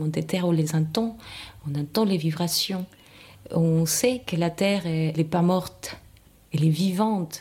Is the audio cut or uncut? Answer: cut